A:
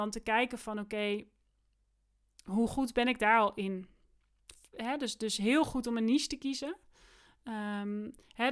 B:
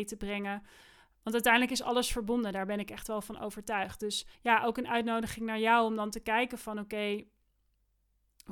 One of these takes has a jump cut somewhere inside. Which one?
B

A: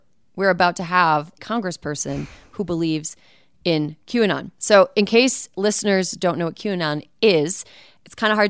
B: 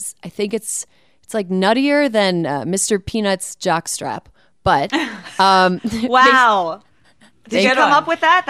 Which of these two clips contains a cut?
A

